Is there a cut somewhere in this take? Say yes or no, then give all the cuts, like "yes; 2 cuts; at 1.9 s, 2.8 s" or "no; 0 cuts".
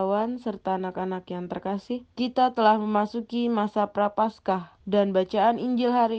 yes; 2 cuts; at 2.1 s, 4.8 s